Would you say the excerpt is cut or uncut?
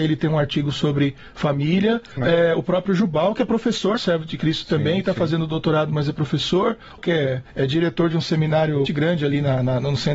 cut